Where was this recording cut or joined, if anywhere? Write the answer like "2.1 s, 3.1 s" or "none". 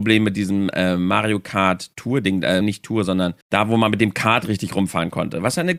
2.6 s, 3.4 s